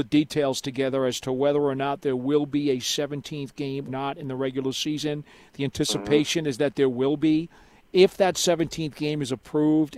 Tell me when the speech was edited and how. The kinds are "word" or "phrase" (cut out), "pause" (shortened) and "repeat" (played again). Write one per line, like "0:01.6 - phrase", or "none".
0:03.9 - word